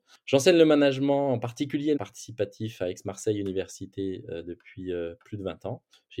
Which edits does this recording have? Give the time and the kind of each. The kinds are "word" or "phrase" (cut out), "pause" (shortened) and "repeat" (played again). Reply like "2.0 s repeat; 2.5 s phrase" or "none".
2.0 s word